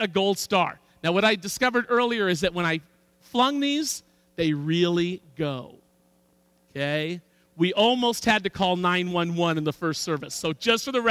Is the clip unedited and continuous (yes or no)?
yes